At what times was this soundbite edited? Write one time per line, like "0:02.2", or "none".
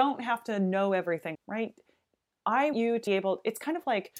0:01.3
0:02.7
0:03.1